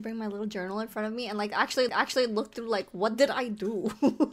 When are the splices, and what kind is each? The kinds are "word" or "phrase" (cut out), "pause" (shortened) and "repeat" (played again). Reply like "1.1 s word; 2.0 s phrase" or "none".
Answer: 1.9 s repeat